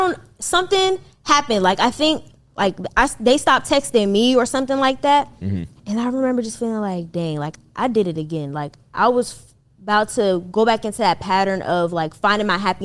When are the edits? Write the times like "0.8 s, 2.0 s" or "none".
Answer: none